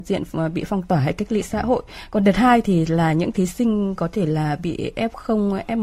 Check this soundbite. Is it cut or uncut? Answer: uncut